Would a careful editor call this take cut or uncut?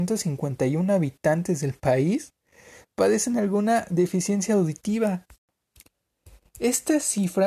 uncut